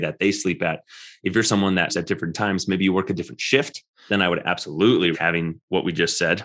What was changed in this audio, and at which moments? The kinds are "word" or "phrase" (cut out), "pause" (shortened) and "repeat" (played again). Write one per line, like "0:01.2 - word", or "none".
0:01.9 - word
0:04.1 - word
0:05.1 - word